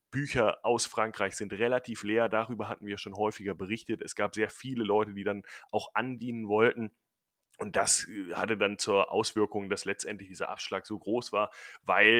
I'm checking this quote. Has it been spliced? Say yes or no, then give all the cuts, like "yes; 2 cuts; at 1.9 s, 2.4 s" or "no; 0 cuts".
no; 0 cuts